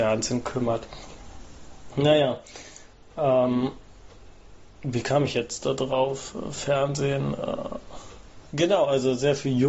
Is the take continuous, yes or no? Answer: yes